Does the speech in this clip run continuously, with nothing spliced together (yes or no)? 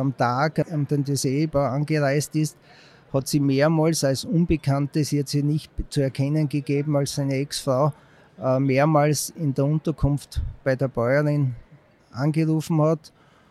yes